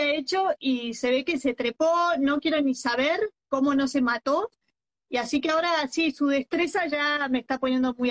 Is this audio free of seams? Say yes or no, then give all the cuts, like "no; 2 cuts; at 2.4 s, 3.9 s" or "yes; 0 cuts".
yes; 0 cuts